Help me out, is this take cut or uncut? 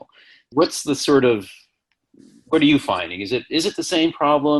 uncut